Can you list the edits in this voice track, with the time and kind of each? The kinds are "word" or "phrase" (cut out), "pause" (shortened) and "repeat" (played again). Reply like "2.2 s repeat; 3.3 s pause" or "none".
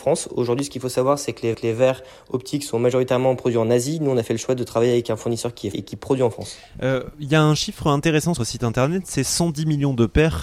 1.5 s repeat; 5.7 s word; 8.4 s phrase